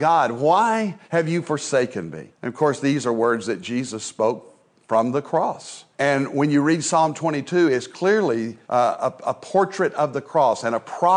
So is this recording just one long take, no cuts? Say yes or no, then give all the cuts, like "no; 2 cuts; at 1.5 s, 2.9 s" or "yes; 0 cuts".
no; 4 cuts; at 1.0 s, 2.3 s, 5.9 s, 8.6 s